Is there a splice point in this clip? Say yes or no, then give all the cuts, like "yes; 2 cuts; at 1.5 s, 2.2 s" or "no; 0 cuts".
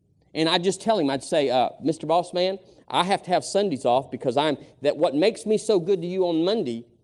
no; 0 cuts